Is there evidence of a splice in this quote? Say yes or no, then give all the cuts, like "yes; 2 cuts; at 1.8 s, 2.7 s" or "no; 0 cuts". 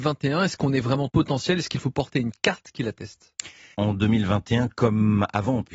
yes; 2 cuts; at 1.1 s, 3.7 s